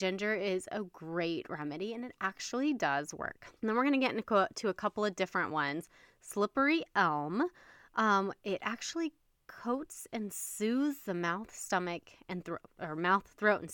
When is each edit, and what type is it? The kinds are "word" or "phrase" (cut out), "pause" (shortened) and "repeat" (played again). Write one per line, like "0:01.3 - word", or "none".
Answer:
0:03.6 - pause